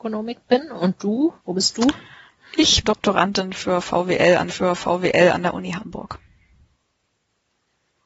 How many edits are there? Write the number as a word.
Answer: three